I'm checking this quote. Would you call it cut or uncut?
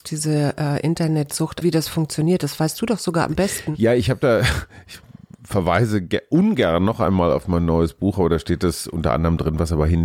cut